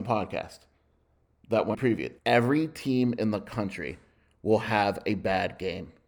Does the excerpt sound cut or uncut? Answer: cut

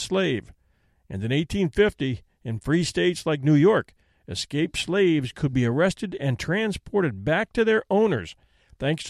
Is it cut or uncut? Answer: uncut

